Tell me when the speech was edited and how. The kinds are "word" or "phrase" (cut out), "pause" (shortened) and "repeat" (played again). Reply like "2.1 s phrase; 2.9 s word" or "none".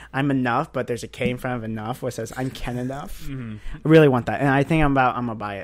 none